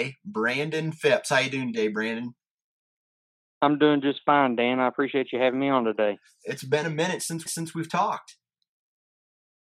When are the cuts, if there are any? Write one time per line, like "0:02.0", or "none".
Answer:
0:07.5

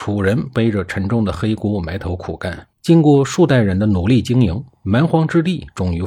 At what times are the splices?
0:02.7

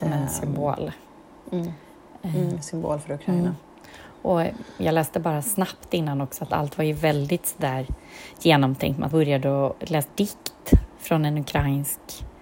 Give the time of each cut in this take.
0:09.1
0:10.1

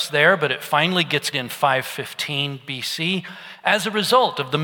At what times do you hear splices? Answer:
0:01.3

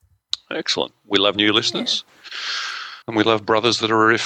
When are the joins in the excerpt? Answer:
0:03.0

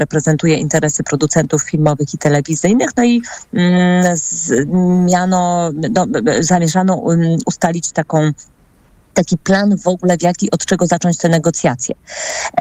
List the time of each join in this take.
none

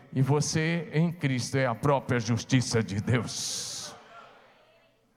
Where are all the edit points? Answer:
none

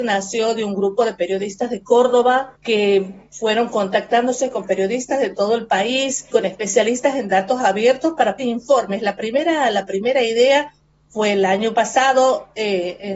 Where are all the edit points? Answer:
0:02.5
0:06.3
0:08.4

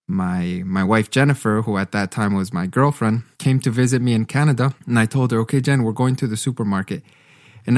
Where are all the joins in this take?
0:03.3
0:04.8

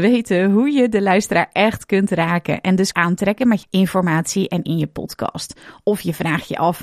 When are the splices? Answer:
0:02.9
0:03.6
0:04.6

